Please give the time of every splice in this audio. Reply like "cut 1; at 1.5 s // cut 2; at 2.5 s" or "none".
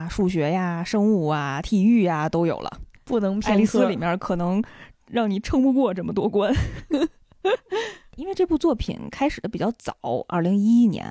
cut 1; at 2.9 s